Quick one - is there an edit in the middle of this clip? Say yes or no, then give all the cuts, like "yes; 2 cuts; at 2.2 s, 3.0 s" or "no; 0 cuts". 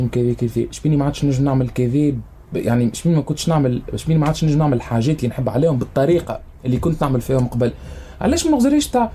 no; 0 cuts